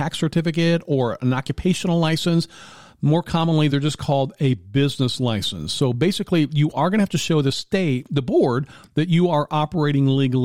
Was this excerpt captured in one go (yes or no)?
yes